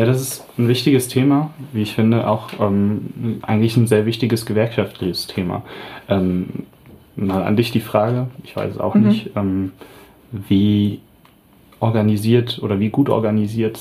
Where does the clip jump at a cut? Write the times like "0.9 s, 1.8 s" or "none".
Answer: none